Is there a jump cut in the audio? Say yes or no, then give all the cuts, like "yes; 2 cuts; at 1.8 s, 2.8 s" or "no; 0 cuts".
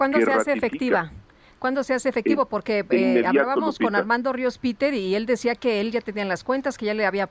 no; 0 cuts